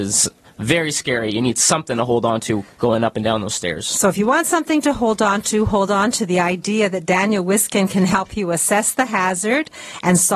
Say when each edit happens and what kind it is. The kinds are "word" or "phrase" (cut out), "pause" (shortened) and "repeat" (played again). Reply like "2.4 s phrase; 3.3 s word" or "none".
none